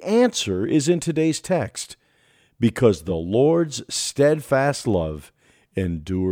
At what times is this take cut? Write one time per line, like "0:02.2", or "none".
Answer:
none